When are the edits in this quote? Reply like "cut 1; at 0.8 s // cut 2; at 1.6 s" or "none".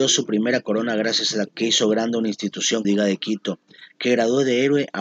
cut 1; at 1.5 s // cut 2; at 2.8 s

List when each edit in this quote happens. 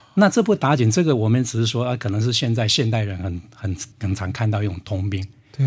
cut 1; at 3.9 s

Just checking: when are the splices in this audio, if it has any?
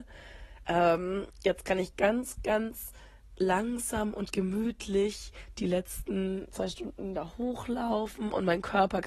none

